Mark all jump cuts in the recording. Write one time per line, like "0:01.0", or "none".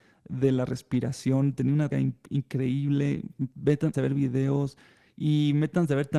0:01.9
0:03.9

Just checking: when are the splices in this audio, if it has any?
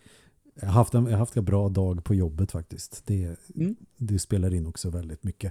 0:01.3

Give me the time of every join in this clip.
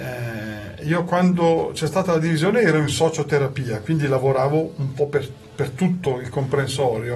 none

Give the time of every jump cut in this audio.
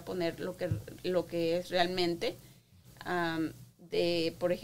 none

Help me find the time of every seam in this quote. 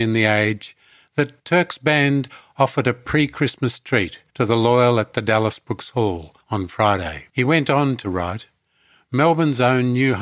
0:01.4
0:04.3
0:06.4
0:07.3

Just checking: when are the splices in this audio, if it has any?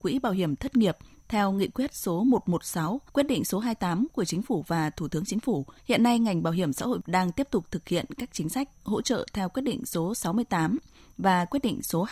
0:03.1
0:05.8

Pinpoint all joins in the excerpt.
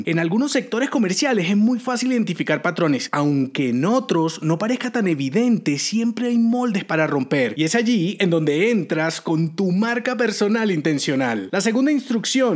none

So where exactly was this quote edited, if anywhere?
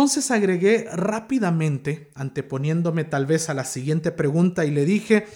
none

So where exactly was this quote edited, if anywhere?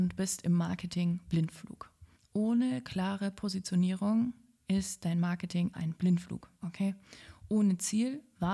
0:02.2
0:05.7

